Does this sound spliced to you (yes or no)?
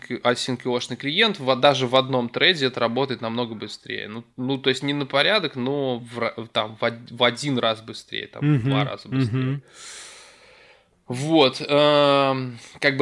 no